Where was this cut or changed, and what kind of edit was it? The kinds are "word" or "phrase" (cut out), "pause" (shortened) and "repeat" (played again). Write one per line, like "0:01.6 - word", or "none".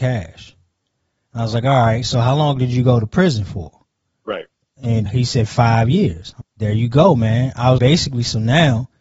0:05.1 - word
0:06.4 - word
0:07.8 - word